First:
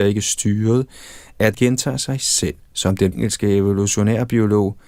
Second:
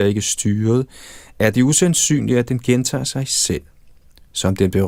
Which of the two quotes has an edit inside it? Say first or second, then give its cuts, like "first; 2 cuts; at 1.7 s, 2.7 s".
first; 3 cuts; at 1.5 s, 2.6 s, 3.1 s